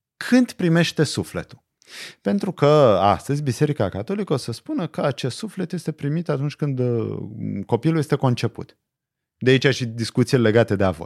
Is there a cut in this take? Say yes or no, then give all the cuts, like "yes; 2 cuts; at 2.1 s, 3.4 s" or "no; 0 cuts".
no; 0 cuts